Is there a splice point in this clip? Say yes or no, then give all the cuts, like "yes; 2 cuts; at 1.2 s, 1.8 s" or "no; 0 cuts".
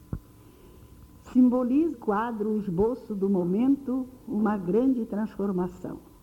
yes; 1 cut; at 1.9 s